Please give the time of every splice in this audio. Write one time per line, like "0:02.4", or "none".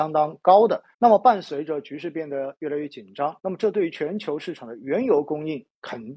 0:00.9
0:03.4